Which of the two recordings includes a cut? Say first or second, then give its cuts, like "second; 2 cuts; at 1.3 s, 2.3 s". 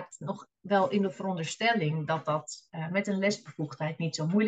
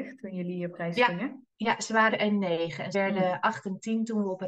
second; 3 cuts; at 1.5 s, 2.1 s, 2.9 s